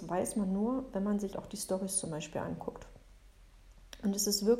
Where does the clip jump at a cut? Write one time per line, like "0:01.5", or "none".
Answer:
0:01.3

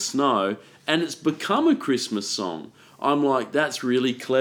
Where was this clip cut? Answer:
none

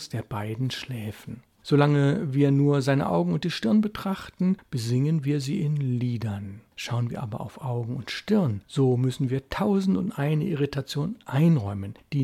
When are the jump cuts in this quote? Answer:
none

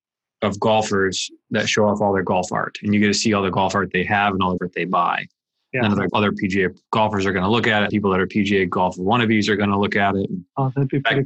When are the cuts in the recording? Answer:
0:04.6
0:06.1
0:07.9

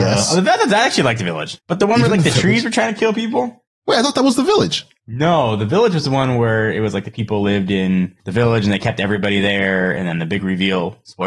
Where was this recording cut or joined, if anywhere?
0:01.6
0:08.2

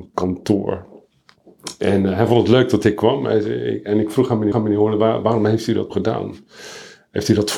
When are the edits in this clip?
0:04.5
0:05.9

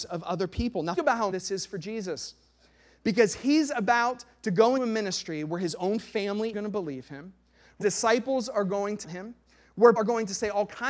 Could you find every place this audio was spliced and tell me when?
0:01.0
0:01.3
0:04.8
0:06.5
0:07.8
0:09.0
0:10.0

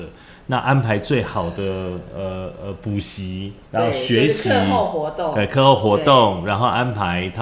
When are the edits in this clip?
0:03.7

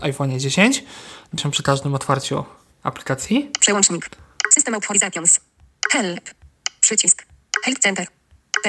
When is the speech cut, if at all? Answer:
0:01.4

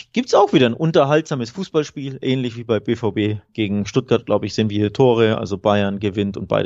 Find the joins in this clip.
0:03.5

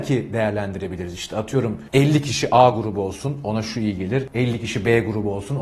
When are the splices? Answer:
none

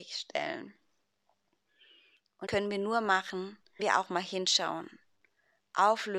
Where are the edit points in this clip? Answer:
0:02.5
0:03.8

